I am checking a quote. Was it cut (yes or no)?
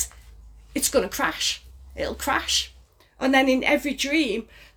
no